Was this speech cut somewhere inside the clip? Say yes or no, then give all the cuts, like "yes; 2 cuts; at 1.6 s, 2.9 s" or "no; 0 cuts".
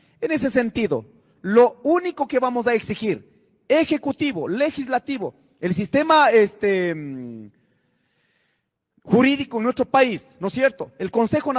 no; 0 cuts